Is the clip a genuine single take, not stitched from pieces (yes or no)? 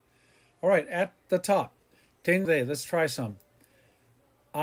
no